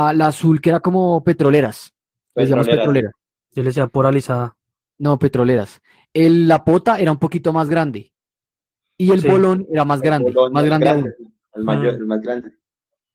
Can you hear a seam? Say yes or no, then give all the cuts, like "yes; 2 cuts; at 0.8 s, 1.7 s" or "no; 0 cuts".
no; 0 cuts